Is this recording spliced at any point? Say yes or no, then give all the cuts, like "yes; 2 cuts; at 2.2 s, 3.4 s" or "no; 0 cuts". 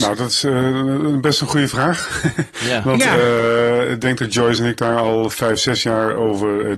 no; 0 cuts